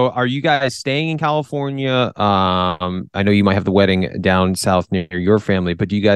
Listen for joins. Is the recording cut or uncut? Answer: uncut